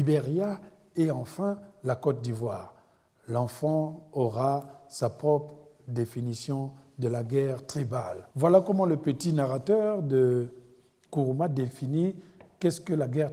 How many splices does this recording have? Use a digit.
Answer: 1